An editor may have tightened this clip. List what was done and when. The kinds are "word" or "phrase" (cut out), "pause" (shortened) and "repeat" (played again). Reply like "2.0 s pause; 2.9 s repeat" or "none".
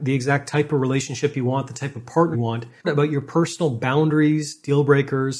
2.3 s word; 2.8 s phrase